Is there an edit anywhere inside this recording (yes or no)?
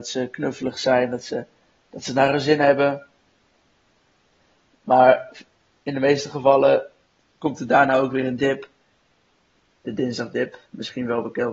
no